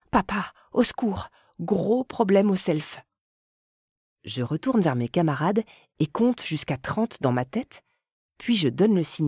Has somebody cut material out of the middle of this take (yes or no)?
no